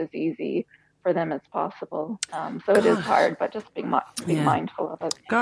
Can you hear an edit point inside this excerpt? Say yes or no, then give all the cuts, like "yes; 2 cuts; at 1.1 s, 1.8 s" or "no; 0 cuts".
yes; 1 cut; at 2.3 s